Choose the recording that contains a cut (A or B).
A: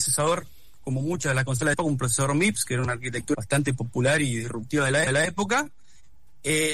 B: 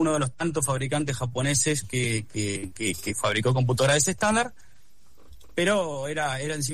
A